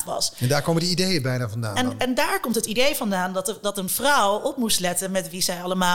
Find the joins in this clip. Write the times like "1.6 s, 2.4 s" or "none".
none